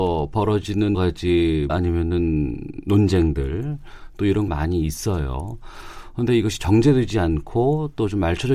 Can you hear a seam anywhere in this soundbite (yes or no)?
yes